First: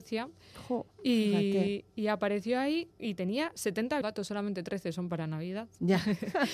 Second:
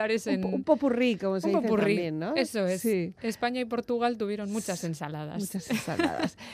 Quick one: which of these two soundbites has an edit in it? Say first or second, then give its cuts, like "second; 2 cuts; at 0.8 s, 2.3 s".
first; 2 cuts; at 2.9 s, 4.0 s